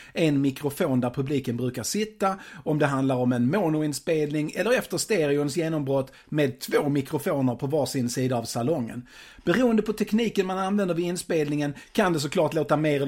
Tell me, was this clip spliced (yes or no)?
no